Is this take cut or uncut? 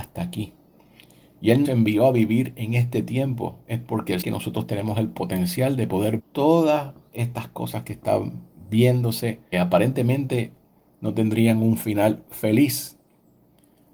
cut